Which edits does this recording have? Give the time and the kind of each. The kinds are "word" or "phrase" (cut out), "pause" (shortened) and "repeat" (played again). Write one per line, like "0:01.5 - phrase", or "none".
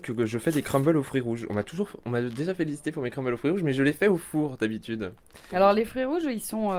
none